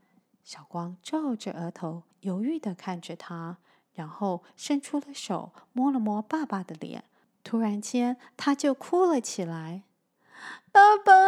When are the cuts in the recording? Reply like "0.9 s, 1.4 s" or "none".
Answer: 2.1 s